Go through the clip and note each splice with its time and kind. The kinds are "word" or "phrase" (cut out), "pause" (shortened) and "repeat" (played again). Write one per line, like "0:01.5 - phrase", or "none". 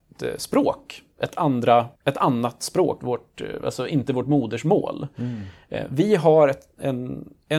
0:02.0 - pause
0:03.0 - word